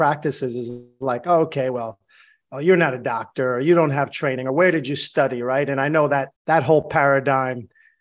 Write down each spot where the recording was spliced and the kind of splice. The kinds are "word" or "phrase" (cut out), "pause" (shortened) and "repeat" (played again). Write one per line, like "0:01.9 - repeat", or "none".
0:06.4 - pause